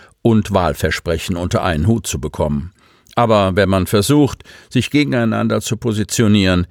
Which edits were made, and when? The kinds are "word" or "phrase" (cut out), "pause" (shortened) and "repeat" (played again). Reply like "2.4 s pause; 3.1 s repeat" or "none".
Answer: none